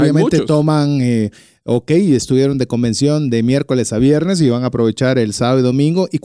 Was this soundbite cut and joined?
no; 0 cuts

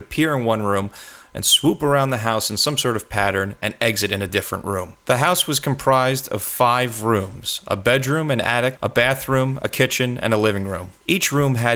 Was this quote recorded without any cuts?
yes; 0 cuts

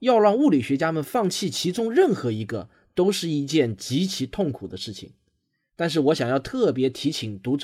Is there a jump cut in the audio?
no; 0 cuts

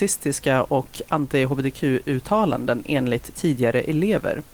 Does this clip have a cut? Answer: no; 0 cuts

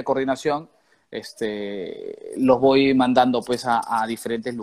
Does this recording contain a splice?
no; 0 cuts

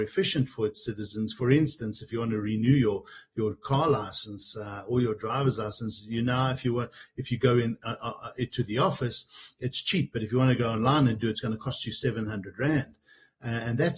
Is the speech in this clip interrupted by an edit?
no; 0 cuts

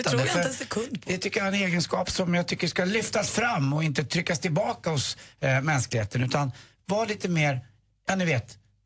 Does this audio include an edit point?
no; 0 cuts

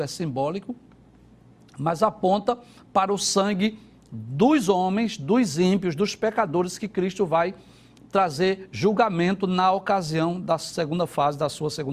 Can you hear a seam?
no; 0 cuts

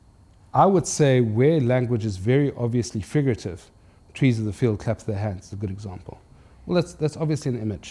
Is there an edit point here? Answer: no; 0 cuts

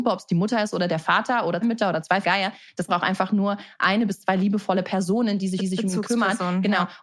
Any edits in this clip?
yes; 4 cuts; at 1.6 s, 2.2 s, 2.9 s, 5.6 s

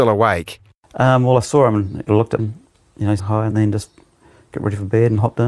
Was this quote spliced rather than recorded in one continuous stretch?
yes; 4 cuts; at 2.1 s, 2.4 s, 3.2 s, 3.5 s

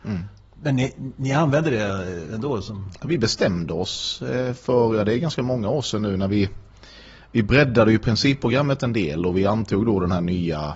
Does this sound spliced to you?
no; 0 cuts

